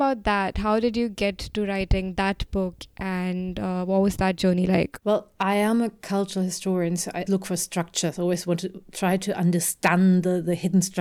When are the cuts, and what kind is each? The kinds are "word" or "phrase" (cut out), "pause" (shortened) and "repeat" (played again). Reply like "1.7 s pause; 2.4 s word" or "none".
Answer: 5.0 s pause; 7.3 s word